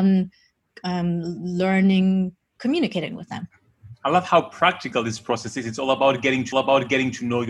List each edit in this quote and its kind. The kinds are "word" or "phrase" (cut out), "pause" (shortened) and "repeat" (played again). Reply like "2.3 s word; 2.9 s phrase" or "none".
6.5 s repeat